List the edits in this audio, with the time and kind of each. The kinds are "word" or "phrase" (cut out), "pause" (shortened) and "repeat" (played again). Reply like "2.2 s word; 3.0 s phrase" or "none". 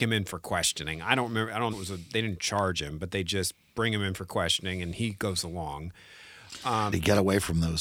1.7 s phrase; 6.9 s word